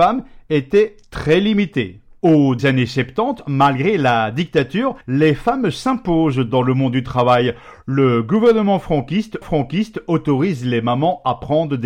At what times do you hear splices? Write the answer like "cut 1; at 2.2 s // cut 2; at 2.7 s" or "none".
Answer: cut 1; at 2.6 s // cut 2; at 5.0 s // cut 3; at 9.4 s